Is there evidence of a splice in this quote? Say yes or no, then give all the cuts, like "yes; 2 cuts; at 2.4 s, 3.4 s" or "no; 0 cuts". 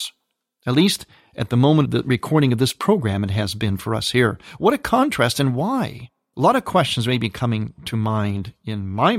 no; 0 cuts